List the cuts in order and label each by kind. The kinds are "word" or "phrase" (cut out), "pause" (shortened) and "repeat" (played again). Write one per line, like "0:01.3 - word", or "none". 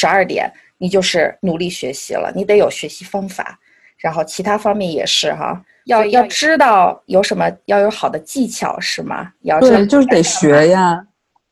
0:01.4 - pause